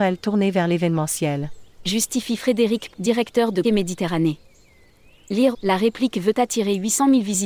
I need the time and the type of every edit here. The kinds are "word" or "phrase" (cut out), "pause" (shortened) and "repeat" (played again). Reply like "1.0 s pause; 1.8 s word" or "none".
2.9 s word; 3.6 s word; 5.5 s phrase